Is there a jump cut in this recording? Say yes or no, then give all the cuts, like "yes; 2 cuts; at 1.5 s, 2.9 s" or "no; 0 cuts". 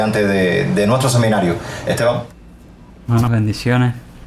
yes; 1 cut; at 3.3 s